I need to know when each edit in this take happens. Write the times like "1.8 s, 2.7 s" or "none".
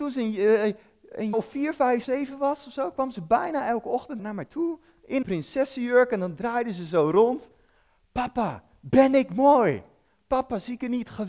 1.3 s, 2.0 s, 4.2 s, 5.2 s